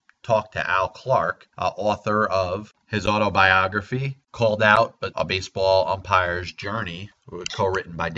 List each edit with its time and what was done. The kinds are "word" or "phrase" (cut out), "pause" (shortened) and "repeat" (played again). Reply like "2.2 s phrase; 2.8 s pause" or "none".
1.5 s pause; 2.8 s pause; 4.2 s pause; 5.1 s word